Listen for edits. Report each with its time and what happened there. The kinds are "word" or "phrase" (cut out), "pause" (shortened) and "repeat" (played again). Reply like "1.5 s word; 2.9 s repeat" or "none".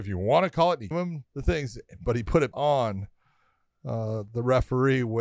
0.9 s word; 1.3 s pause; 2.5 s word